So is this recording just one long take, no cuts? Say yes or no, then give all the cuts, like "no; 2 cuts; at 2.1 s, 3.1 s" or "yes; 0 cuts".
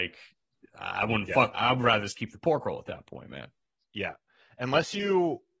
yes; 0 cuts